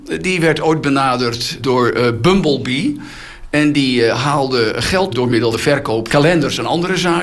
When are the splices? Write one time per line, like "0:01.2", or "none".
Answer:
0:01.6
0:05.1
0:05.5
0:06.1